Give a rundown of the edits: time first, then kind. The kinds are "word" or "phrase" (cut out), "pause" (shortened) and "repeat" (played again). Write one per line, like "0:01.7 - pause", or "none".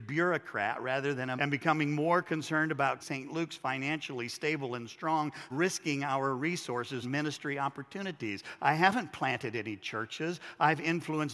0:01.4 - word
0:03.0 - word
0:05.5 - word
0:07.0 - word